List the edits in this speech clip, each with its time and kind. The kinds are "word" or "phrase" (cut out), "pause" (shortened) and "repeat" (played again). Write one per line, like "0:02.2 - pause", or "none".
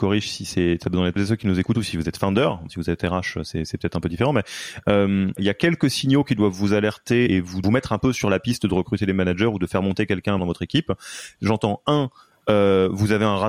0:01.2 - phrase
0:01.7 - word
0:02.7 - word
0:05.4 - word
0:07.3 - word
0:07.6 - phrase
0:10.4 - word